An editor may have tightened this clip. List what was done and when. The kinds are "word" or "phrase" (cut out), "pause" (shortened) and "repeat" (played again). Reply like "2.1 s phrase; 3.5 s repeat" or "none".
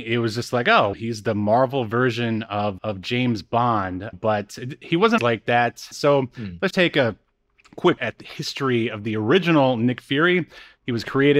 0.9 s word; 2.8 s word; 4.1 s word; 5.2 s word; 5.9 s word; 6.7 s word; 8.0 s word